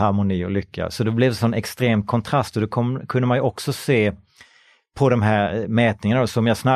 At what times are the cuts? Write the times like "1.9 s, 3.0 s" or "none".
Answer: none